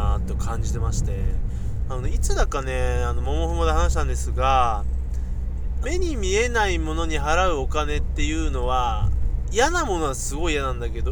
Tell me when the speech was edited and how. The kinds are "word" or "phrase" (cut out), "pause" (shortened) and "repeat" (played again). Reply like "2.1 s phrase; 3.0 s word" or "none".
5.8 s phrase